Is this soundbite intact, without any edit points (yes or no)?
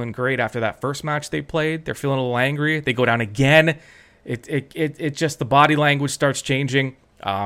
yes